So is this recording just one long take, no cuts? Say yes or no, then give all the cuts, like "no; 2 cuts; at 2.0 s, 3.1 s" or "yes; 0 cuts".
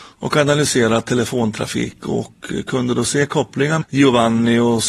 no; 1 cut; at 3.8 s